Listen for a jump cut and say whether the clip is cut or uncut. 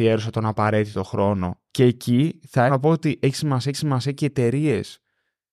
cut